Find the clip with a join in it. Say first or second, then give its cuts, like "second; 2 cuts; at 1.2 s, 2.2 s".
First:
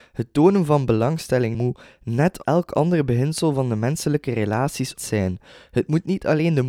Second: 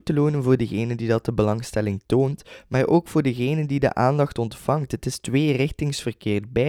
first; 3 cuts; at 1.5 s, 2.4 s, 5.0 s